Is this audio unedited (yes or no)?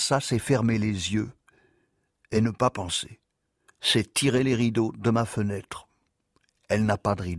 yes